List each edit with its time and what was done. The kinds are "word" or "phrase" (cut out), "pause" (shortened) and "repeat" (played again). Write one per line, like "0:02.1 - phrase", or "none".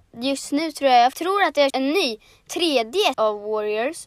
0:01.1 - word
0:01.7 - word
0:03.1 - word